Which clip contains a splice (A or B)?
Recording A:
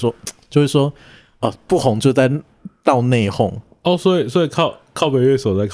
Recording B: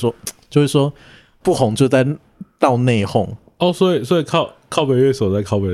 B